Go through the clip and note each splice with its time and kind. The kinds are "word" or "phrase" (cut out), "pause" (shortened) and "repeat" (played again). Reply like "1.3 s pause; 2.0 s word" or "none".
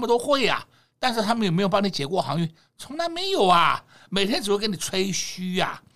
none